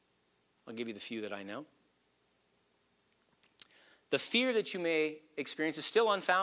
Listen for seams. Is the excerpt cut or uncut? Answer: uncut